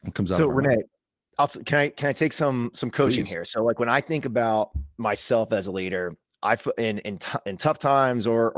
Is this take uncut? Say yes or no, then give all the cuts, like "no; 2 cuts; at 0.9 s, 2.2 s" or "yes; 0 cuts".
yes; 0 cuts